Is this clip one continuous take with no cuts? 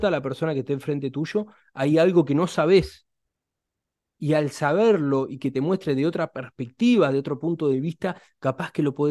yes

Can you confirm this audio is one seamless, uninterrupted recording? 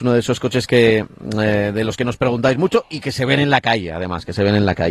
yes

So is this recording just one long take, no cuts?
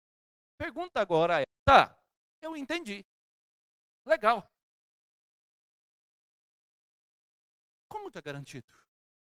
no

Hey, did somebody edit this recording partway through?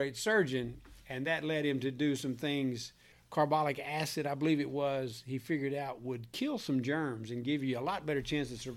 no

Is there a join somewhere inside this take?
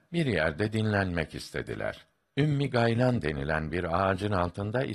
no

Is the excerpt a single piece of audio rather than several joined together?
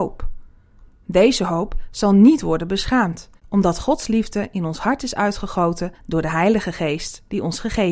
no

